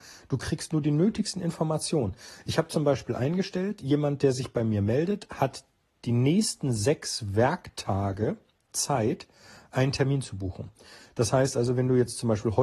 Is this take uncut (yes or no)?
yes